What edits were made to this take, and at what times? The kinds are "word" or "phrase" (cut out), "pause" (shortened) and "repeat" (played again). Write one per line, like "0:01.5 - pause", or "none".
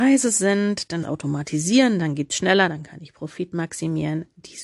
0:01.0 - phrase